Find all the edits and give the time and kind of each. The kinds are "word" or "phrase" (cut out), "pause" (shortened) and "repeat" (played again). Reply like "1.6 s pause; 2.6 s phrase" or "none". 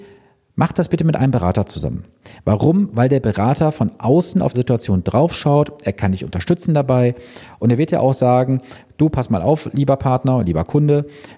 4.5 s word